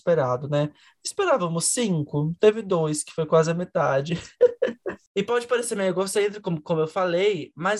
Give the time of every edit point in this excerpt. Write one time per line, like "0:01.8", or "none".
none